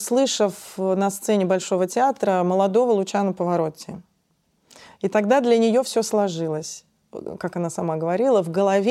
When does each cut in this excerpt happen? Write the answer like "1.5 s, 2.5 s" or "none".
none